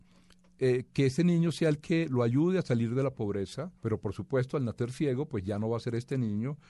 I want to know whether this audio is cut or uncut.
cut